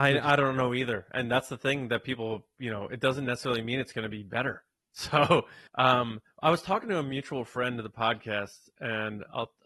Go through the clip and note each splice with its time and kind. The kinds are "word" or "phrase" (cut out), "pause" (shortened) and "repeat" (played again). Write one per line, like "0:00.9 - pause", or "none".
0:05.7 - pause